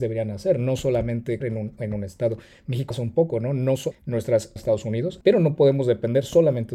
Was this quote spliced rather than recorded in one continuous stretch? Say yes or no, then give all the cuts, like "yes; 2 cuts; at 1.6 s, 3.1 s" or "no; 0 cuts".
yes; 5 cuts; at 1.4 s, 2.9 s, 3.9 s, 4.6 s, 5.2 s